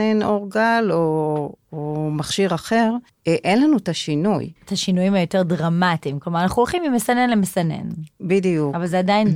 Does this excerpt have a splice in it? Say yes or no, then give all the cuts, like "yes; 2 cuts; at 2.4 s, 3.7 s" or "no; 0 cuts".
yes; 3 cuts; at 1.6 s, 3.1 s, 4.6 s